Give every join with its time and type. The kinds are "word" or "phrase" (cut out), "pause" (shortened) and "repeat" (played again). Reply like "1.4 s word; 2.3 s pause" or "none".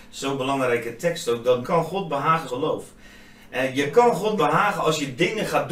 1.6 s word; 2.5 s word; 4.4 s word